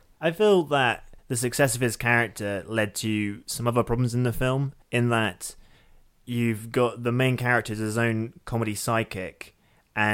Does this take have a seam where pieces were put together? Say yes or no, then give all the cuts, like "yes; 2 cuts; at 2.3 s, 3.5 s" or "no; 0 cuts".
yes; 2 cuts; at 1.2 s, 4.8 s